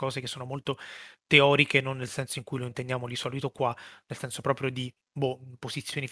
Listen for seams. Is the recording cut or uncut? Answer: uncut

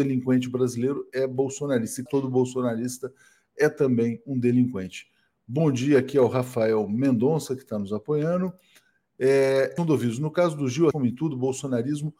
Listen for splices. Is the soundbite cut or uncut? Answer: cut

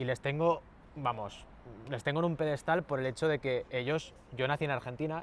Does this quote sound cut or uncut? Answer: uncut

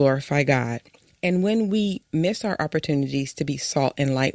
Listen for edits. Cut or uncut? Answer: uncut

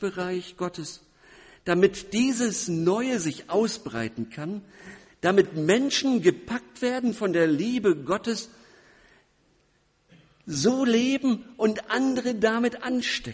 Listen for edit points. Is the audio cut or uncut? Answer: uncut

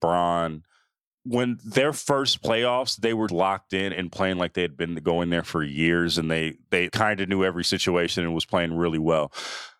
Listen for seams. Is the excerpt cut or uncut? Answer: cut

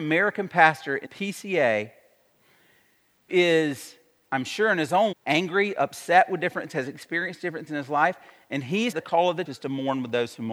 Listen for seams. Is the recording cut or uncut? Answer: cut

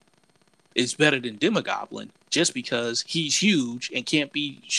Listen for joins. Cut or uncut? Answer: uncut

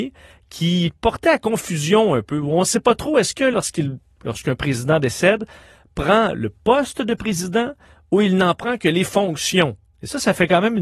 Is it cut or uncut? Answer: cut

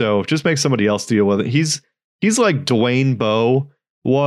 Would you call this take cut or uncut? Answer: uncut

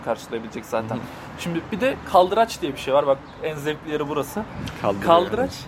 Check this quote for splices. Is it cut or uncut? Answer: uncut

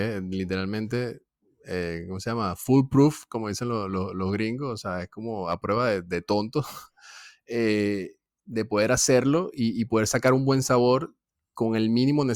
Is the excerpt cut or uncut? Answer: uncut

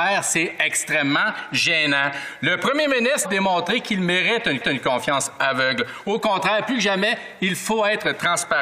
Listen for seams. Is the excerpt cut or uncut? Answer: cut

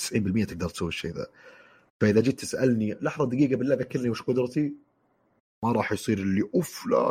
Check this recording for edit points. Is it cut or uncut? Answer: uncut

